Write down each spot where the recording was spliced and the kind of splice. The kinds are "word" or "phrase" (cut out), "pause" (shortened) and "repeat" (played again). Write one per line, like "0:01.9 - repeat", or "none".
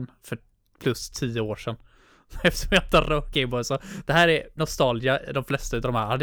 0:03.3 - word
0:04.6 - word

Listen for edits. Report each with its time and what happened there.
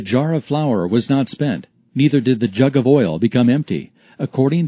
none

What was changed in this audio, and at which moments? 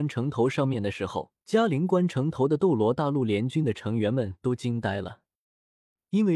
0:01.4 - pause

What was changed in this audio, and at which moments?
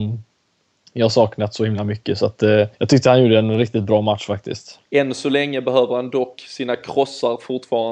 0:02.7 - pause
0:04.9 - pause

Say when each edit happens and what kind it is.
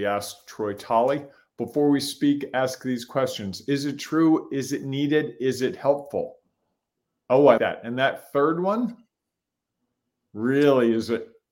0:07.6 - word

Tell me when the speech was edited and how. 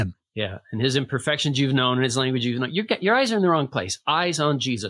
none

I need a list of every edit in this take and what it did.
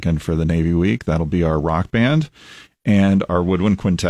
none

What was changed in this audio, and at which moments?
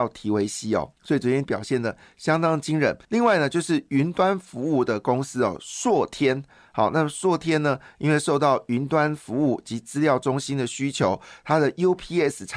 0:01.0 - pause
0:01.4 - word
0:03.0 - pause

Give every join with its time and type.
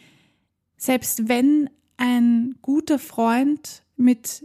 none

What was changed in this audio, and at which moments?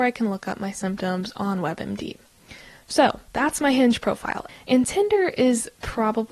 0:03.3 - pause

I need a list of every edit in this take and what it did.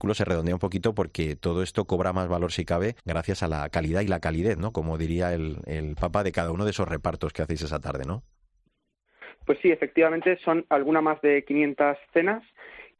0:03.0 - pause

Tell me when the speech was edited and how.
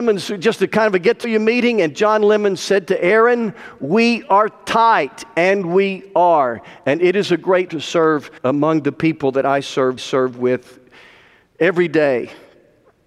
0:01.2 - word
0:07.7 - word
0:08.4 - pause
0:10.0 - repeat

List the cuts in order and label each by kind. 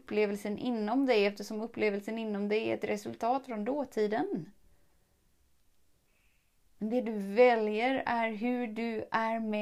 none

